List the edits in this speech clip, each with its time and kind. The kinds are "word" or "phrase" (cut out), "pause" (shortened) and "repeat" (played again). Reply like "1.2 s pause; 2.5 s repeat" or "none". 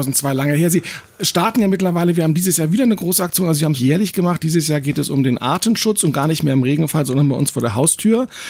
3.7 s word